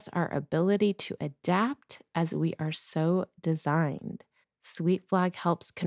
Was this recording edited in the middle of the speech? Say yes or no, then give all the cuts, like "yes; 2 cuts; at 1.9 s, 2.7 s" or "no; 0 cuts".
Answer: yes; 1 cut; at 4.4 s